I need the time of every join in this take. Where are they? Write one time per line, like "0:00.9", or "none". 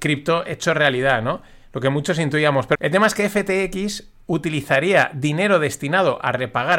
0:02.7